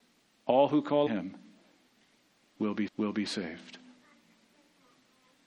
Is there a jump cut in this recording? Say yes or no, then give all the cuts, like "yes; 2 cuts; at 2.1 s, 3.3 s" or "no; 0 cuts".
yes; 2 cuts; at 1.1 s, 2.9 s